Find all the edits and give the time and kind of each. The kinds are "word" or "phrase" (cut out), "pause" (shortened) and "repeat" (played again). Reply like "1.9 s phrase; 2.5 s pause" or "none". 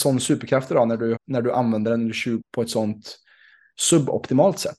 1.2 s word; 2.4 s word

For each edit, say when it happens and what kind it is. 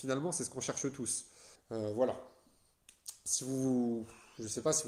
1.6 s pause

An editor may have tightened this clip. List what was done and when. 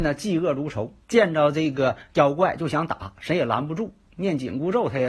1.0 s pause

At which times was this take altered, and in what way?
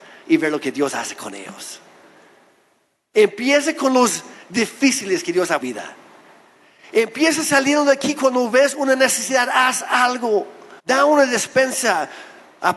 5.6 s phrase; 10.8 s pause

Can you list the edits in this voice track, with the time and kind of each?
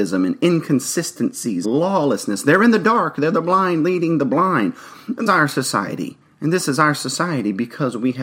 1.6 s word; 5.3 s phrase; 6.2 s pause

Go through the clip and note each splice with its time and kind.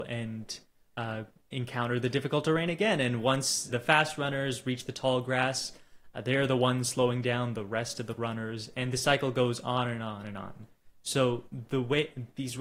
3.7 s word

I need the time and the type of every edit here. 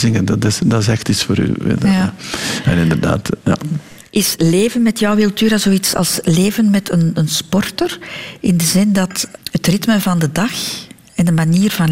3.4 s pause; 9.4 s pause

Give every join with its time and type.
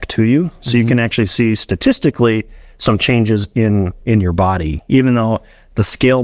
none

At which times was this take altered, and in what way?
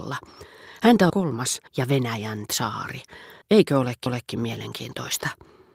1.1 s phrase; 1.7 s pause; 3.4 s pause; 4.1 s repeat

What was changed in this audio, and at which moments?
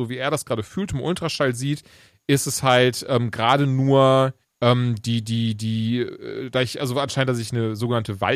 4.4 s pause

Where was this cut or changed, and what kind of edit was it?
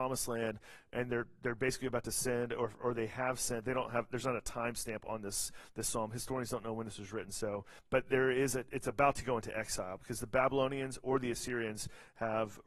7.8 s pause

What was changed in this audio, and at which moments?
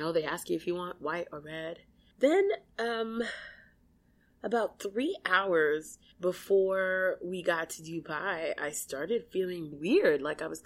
9.7 s word

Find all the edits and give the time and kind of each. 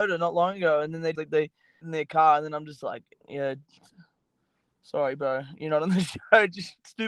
1.2 s word; 1.8 s phrase

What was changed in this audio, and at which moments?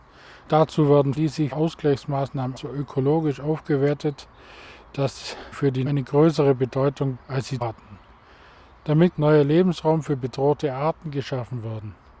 1.1 s word; 1.5 s word; 2.6 s word; 5.5 s word; 5.9 s word; 7.2 s word; 7.6 s word; 9.1 s word

